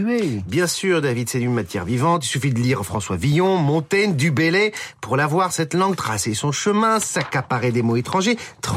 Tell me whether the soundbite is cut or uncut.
uncut